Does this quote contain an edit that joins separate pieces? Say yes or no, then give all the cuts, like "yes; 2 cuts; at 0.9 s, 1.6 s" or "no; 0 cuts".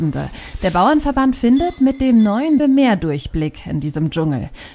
yes; 1 cut; at 2.6 s